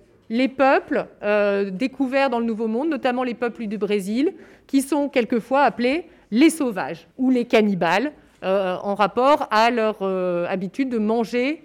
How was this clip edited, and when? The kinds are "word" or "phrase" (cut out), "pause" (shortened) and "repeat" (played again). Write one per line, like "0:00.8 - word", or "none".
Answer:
0:07.1 - pause